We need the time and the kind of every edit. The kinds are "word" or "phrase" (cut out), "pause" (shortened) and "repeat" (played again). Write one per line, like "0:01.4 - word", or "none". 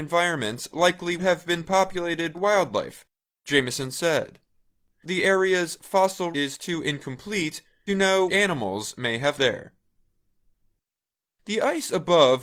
0:01.2 - word
0:02.3 - word
0:05.0 - word
0:06.3 - word
0:07.9 - word
0:08.3 - word
0:09.4 - word